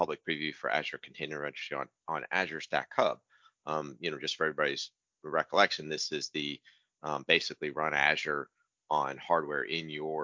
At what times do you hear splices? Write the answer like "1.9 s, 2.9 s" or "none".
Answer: none